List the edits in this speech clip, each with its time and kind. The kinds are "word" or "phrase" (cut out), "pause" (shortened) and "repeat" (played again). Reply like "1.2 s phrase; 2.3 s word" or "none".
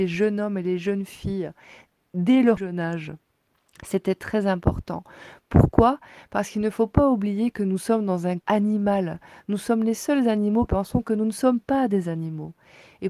2.6 s word; 8.4 s word; 10.7 s word